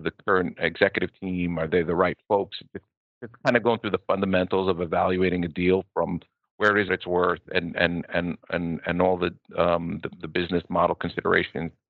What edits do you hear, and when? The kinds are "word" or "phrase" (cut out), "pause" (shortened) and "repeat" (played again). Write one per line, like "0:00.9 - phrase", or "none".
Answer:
0:06.9 - phrase
0:08.1 - word